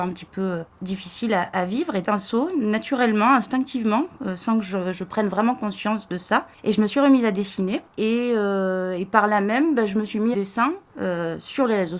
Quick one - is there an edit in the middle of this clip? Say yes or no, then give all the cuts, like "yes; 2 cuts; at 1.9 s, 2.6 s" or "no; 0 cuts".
yes; 3 cuts; at 2.0 s, 6.5 s, 10.3 s